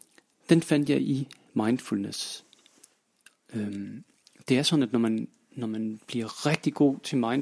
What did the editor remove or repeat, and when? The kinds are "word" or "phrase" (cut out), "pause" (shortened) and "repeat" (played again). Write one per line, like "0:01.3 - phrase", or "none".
none